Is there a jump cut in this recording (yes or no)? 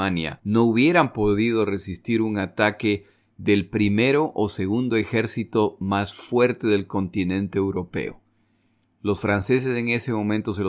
no